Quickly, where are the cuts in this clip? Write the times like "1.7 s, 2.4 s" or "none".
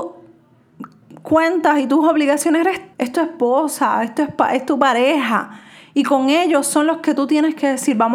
2.9 s

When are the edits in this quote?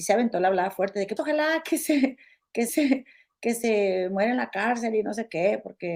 1.2 s, 2.7 s

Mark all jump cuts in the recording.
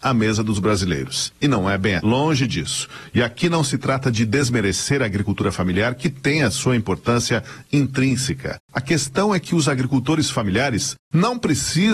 2.0 s

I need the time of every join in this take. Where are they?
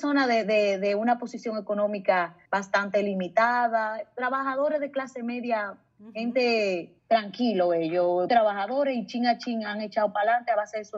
2.4 s, 5.9 s, 7.0 s, 8.3 s

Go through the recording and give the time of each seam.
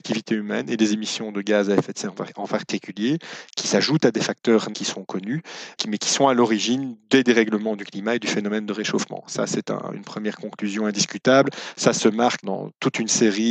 4.7 s, 5.8 s, 12.4 s

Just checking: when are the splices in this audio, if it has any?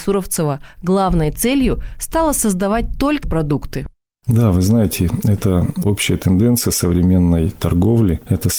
3.2 s

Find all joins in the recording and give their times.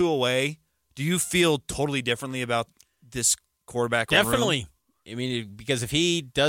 none

